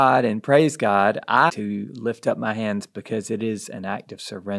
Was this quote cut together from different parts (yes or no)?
yes